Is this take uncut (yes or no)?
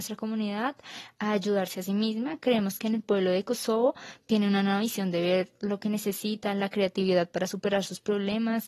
yes